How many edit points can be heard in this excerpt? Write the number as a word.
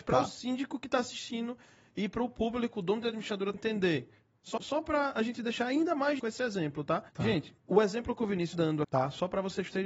seven